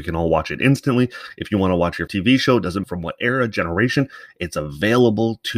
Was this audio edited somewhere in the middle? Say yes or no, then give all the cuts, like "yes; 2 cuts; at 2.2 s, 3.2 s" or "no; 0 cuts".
yes; 2 cuts; at 2.1 s, 2.8 s